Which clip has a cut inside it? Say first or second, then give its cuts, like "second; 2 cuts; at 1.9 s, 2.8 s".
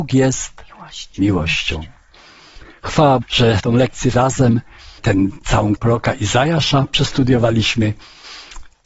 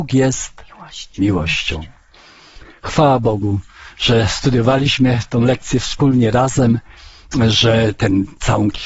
first; 5 cuts; at 3.2 s, 3.6 s, 4.1 s, 5.0 s, 5.8 s